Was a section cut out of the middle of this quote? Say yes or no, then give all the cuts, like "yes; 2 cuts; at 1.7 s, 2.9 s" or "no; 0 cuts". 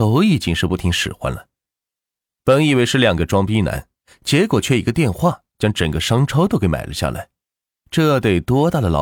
no; 0 cuts